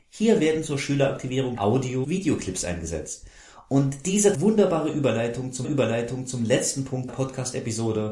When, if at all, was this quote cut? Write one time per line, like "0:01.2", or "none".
0:01.6
0:02.0
0:04.3
0:05.6
0:07.1